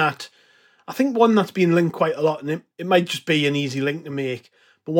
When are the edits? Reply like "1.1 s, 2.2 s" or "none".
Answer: none